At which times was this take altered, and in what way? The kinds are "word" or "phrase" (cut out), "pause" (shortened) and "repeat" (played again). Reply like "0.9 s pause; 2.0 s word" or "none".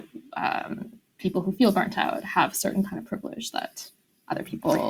none

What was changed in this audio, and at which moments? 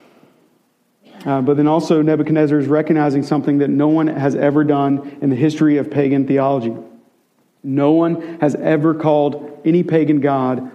none

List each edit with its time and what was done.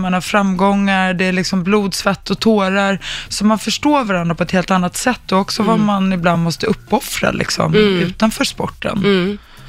none

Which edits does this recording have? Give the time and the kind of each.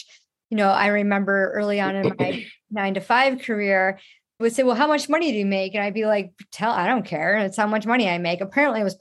4.4 s word

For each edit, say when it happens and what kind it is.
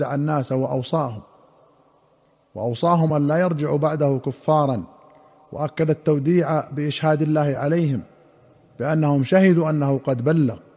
none

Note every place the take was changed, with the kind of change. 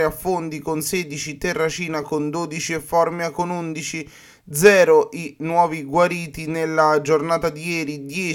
none

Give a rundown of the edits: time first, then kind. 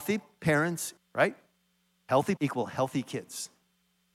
1.0 s phrase; 2.4 s word

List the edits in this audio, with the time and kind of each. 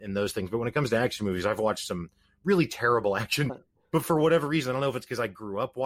3.5 s word

